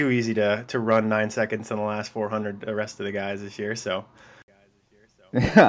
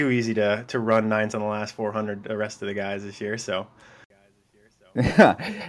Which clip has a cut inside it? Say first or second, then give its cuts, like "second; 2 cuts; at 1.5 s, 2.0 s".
second; 1 cut; at 1.3 s